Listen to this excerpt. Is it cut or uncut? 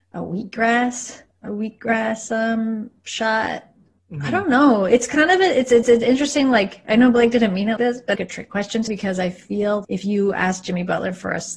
cut